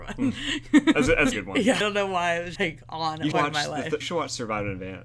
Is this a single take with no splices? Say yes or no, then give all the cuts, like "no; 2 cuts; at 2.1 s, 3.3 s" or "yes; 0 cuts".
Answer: no; 5 cuts; at 1.3 s, 1.8 s, 2.6 s, 3.3 s, 4.0 s